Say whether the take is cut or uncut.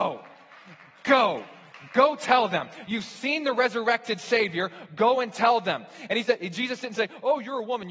uncut